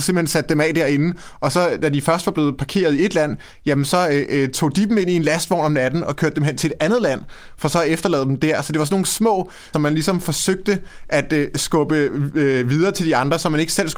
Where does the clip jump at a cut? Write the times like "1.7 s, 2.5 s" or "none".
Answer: 9.7 s